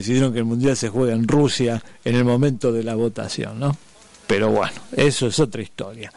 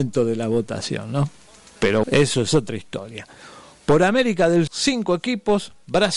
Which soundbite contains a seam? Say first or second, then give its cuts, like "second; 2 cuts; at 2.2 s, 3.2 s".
second; 2 cuts; at 2.0 s, 4.7 s